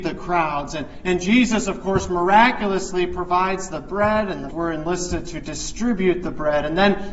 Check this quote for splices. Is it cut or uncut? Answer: cut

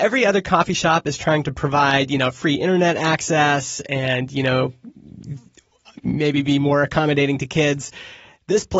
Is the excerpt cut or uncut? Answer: uncut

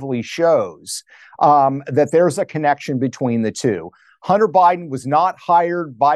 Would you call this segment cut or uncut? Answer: uncut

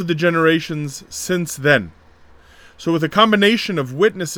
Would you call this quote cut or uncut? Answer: uncut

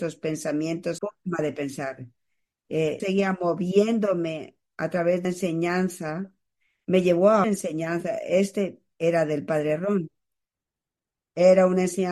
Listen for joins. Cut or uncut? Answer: cut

